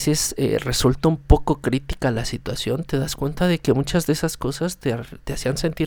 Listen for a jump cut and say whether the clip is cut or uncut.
uncut